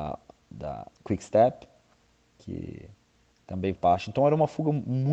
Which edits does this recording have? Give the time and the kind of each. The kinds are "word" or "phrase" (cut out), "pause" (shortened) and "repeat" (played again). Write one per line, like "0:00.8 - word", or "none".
0:00.9 - pause
0:03.8 - word